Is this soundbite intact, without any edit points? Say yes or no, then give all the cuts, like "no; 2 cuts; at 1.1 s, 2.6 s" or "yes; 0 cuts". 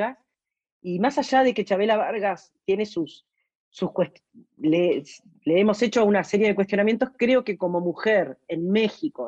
yes; 0 cuts